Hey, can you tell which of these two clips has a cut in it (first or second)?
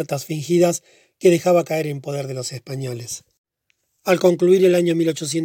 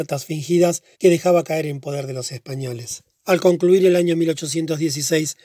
second